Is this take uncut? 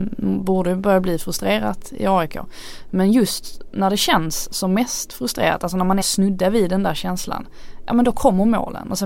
no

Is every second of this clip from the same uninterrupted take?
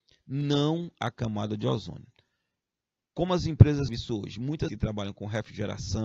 no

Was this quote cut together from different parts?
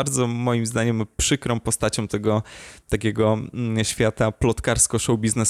no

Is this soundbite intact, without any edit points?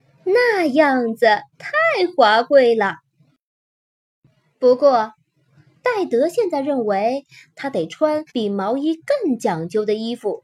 no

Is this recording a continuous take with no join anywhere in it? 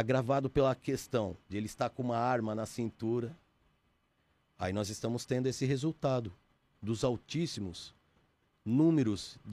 yes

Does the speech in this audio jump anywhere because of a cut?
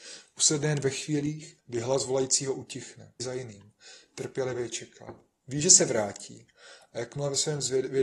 yes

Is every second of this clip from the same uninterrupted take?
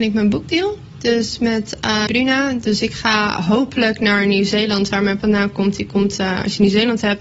no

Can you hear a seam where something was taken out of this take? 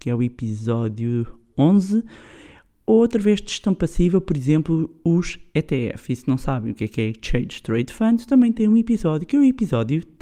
no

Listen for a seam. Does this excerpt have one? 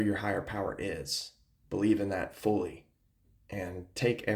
no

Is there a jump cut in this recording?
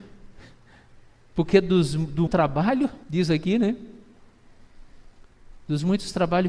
yes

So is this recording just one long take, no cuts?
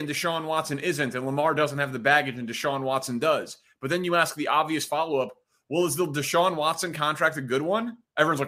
yes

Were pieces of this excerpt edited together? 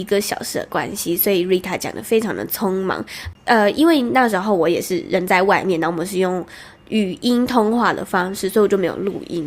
no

